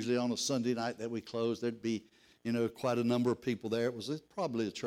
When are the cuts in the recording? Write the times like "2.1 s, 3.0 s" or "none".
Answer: none

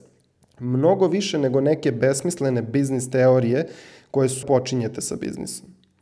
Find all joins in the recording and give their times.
4.4 s

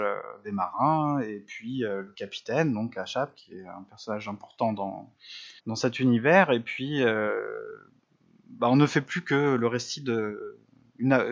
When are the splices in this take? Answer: 5.6 s

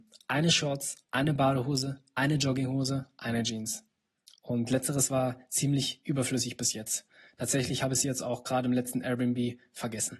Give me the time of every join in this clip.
none

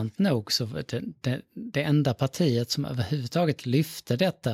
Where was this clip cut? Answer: none

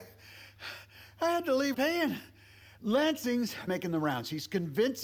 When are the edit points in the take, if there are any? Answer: 1.7 s, 3.7 s

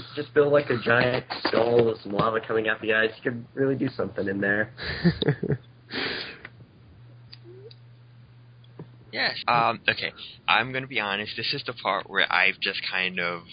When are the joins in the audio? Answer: 9.4 s

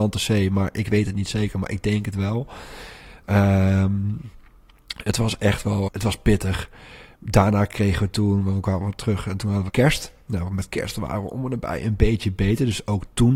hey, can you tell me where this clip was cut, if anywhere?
5.9 s, 9.7 s

